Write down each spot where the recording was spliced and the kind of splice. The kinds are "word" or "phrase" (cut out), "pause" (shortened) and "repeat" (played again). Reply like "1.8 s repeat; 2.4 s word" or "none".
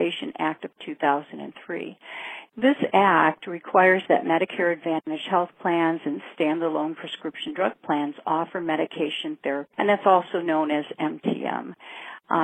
9.7 s word